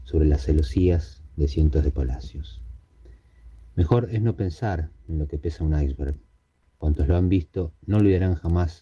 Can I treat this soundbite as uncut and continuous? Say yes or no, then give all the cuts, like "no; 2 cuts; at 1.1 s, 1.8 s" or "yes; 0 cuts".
yes; 0 cuts